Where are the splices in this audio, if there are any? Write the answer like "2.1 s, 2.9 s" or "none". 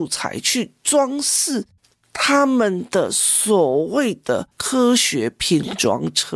none

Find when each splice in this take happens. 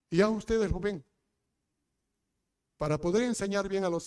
none

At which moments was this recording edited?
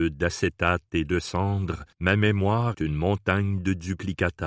1.9 s, 2.7 s

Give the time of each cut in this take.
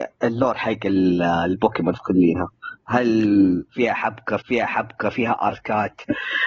2.0 s, 2.8 s, 4.4 s

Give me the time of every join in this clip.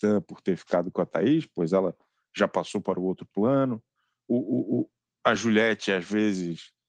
none

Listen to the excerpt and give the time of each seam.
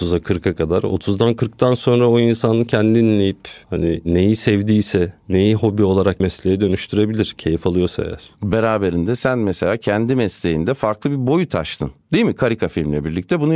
6.2 s

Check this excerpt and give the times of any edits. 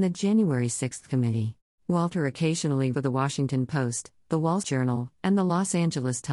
1.7 s, 2.9 s, 4.6 s

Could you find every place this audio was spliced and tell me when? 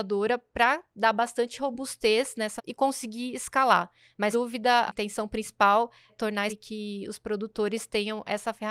2.6 s, 4.3 s, 4.9 s, 6.1 s, 6.5 s

